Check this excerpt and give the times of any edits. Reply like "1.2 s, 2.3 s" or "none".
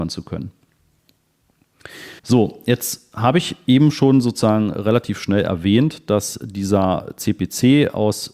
2.2 s